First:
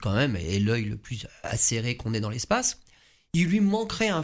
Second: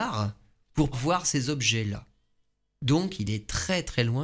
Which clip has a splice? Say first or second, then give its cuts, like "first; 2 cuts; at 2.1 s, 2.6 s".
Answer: second; 1 cut; at 0.9 s